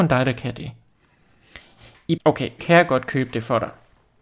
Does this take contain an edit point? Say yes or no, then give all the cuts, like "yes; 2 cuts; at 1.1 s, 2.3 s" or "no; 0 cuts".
yes; 2 cuts; at 2.2 s, 2.6 s